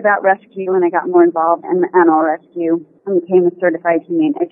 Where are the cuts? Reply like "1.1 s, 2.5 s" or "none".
1.6 s